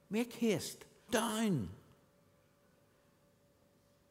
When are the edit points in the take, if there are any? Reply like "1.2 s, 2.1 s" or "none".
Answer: 1.1 s

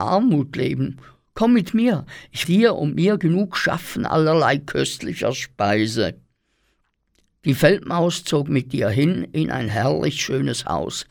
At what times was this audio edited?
2.4 s

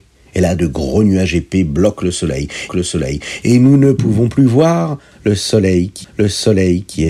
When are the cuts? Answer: 2.7 s, 6.0 s

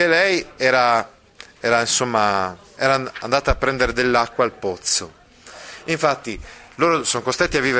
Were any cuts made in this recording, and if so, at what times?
none

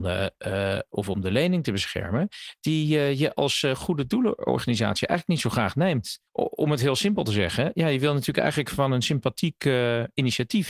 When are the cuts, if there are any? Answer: 6.3 s

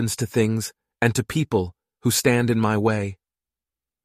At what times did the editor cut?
none

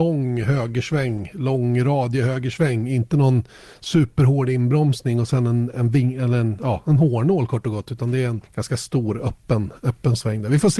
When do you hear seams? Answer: 8.5 s

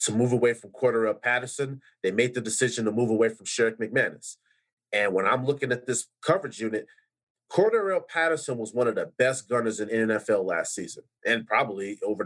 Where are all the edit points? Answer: none

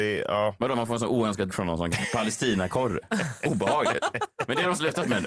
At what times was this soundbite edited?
1.5 s, 1.9 s

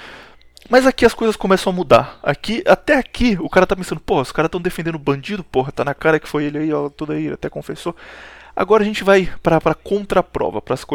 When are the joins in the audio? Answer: none

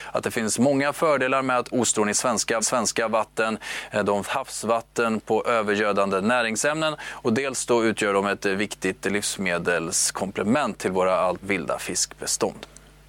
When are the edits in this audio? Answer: 1.7 s, 2.6 s, 4.2 s, 11.4 s

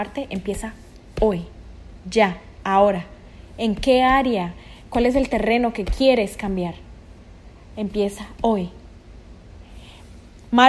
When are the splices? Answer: none

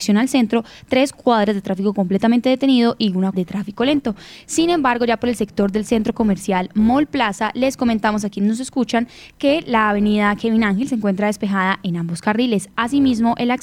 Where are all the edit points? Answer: 3.3 s

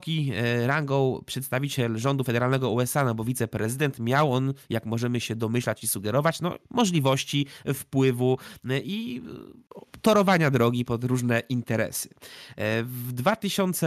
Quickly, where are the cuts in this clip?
6.6 s

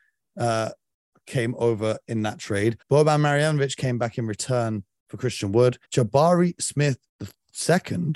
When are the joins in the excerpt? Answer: 2.8 s, 5.8 s, 7.1 s

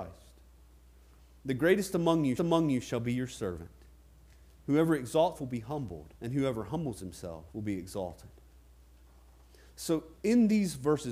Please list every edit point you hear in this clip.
2.4 s, 5.3 s, 6.1 s, 7.5 s, 10.2 s

